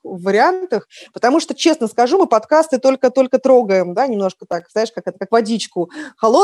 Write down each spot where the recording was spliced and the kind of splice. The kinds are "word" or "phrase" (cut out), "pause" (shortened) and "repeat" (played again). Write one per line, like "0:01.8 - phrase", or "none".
none